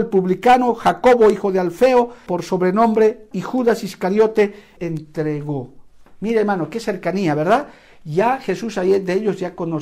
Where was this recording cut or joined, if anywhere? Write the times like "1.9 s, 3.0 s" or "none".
2.3 s, 3.3 s, 4.8 s